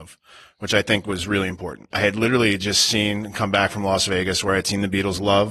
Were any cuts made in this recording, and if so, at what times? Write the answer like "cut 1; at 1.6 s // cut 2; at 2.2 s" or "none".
none